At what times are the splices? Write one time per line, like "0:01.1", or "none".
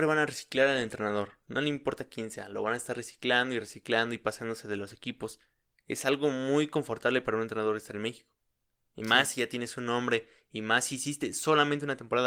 none